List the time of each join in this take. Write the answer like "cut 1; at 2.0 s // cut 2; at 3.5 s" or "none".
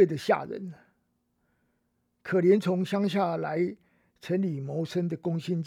none